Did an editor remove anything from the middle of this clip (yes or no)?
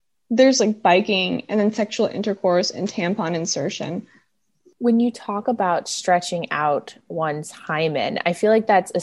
no